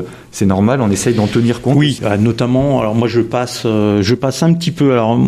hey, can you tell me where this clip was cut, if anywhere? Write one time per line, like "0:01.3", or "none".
none